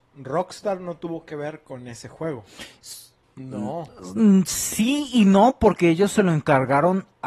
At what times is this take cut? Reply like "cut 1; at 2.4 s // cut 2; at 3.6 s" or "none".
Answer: cut 1; at 3.2 s